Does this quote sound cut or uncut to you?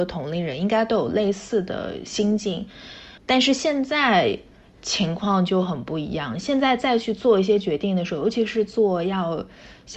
cut